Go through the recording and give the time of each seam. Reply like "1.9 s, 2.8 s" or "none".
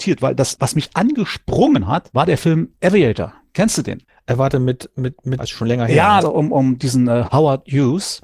5.4 s, 6.2 s